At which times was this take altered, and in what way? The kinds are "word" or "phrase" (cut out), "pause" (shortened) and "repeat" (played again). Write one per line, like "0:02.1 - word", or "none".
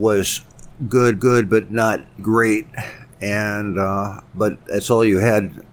0:01.2 - repeat
0:02.2 - word
0:04.3 - pause